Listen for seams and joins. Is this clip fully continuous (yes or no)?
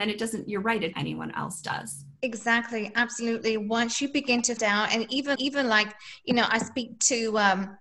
no